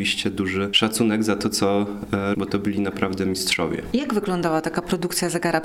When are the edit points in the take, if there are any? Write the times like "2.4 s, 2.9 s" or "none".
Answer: 2.3 s